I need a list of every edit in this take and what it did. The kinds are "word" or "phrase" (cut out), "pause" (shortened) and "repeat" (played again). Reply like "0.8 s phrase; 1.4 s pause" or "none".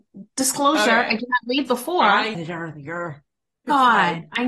1.7 s word; 2.3 s phrase